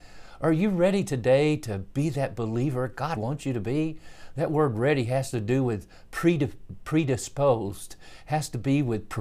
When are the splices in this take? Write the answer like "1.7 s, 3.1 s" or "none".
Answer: 3.2 s